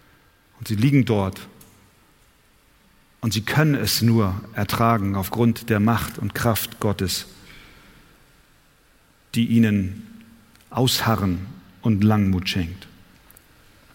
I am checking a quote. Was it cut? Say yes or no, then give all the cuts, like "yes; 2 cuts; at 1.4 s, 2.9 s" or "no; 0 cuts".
no; 0 cuts